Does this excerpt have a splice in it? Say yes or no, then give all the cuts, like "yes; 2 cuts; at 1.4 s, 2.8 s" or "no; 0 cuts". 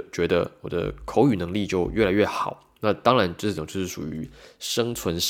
yes; 1 cut; at 2.8 s